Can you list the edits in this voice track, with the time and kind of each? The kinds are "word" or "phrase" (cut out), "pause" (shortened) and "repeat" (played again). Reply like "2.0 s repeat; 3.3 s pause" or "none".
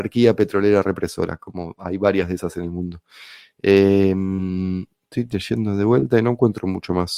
none

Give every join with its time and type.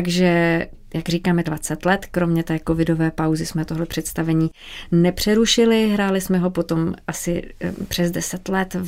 1.4 s word

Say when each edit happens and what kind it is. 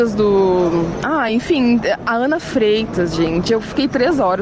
none

